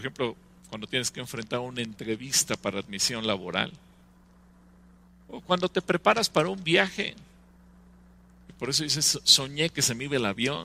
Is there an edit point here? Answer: no; 0 cuts

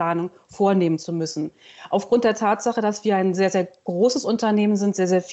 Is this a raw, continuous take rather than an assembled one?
yes; 0 cuts

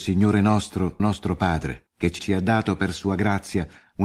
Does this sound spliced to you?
yes; 3 cuts; at 1.0 s, 1.9 s, 2.2 s

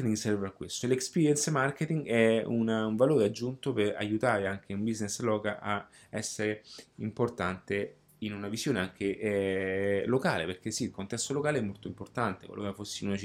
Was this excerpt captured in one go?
yes; 0 cuts

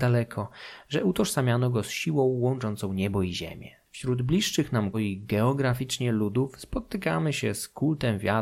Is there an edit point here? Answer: yes; 2 cuts; at 3.8 s, 4.9 s

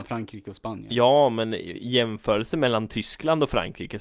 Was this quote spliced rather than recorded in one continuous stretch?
no; 0 cuts

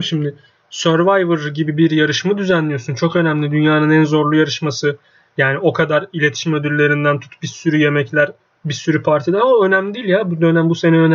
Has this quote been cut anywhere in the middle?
no; 0 cuts

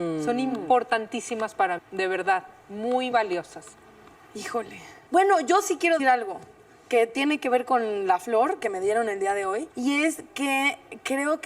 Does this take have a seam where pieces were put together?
yes; 5 cuts; at 1.8 s, 3.1 s, 4.1 s, 6.0 s, 9.7 s

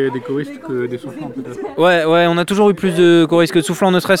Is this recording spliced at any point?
no; 0 cuts

